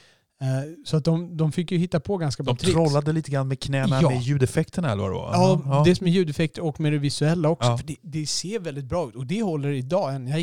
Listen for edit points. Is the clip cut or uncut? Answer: uncut